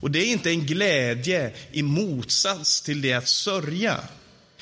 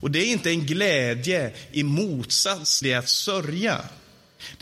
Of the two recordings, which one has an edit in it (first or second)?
second